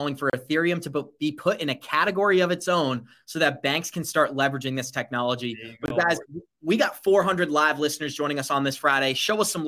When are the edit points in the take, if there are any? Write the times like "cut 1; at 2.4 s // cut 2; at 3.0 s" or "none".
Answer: none